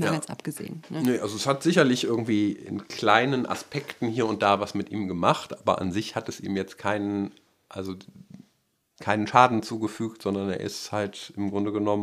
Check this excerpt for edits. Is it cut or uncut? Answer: uncut